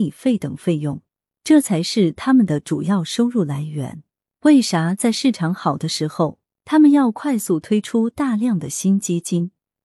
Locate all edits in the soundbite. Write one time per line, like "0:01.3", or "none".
none